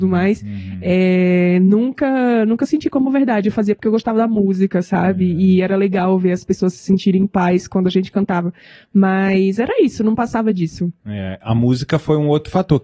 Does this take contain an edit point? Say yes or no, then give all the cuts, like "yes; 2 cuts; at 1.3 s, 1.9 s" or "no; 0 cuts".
no; 0 cuts